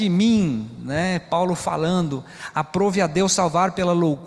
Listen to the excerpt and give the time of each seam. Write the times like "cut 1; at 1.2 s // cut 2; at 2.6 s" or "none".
none